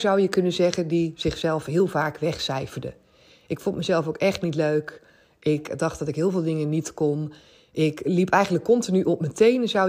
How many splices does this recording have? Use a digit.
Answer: 0